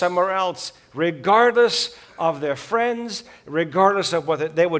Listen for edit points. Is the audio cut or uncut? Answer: uncut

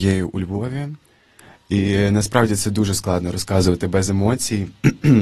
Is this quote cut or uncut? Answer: uncut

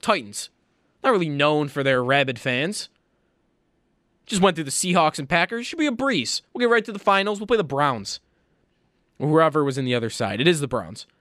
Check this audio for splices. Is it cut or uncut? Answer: uncut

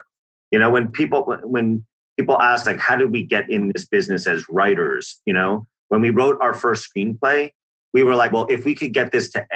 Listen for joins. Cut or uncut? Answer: cut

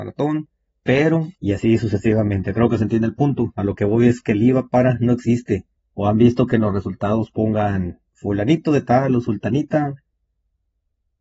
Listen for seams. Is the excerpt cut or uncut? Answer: cut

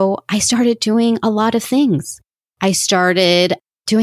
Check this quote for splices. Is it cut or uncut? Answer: uncut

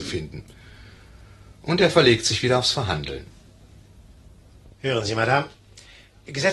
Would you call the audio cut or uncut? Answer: uncut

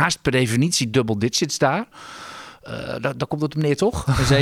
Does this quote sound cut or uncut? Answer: uncut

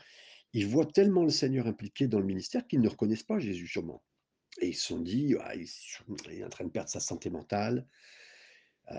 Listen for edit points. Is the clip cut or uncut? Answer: uncut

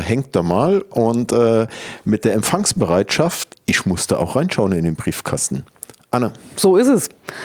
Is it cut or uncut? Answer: cut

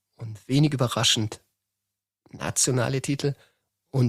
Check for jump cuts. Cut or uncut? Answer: uncut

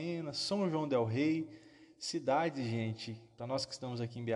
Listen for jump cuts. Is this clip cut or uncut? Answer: uncut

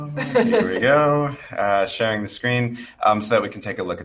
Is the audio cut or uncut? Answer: uncut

